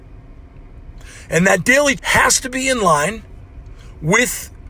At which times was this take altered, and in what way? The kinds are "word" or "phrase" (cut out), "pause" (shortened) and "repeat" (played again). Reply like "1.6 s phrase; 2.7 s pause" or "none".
2.0 s word